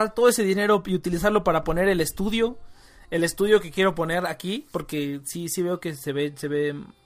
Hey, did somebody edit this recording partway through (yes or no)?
no